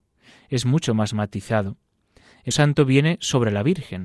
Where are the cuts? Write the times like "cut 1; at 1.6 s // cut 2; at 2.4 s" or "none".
cut 1; at 2.5 s